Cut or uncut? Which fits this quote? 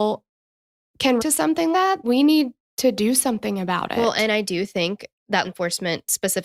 cut